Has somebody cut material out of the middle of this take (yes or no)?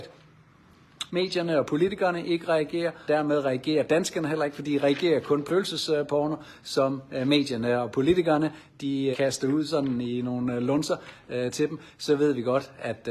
yes